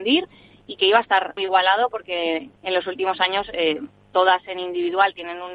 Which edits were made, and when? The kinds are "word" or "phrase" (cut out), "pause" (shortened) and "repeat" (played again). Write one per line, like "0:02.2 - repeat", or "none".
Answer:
0:01.4 - word
0:02.6 - pause